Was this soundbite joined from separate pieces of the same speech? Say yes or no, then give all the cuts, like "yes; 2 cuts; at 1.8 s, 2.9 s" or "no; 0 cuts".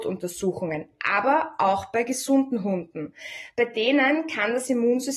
no; 0 cuts